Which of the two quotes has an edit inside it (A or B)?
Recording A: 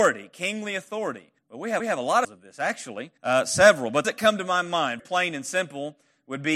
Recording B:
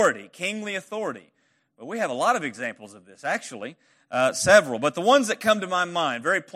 A